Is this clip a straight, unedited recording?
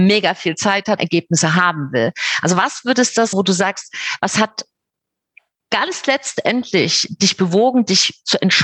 no; 2 cuts; at 1.0 s, 3.3 s

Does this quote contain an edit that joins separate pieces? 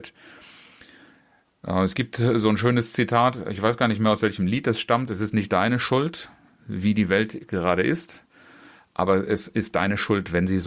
no; 0 cuts

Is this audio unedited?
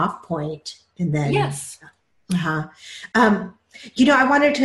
yes; 0 cuts

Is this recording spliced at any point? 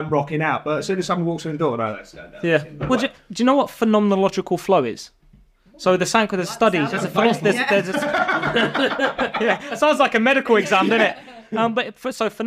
no; 0 cuts

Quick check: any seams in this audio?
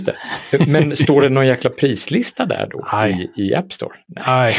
no; 0 cuts

